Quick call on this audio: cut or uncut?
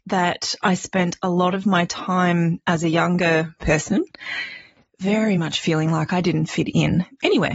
uncut